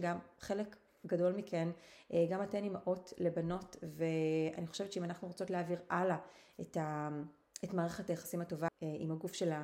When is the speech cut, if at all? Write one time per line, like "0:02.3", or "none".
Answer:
0:08.7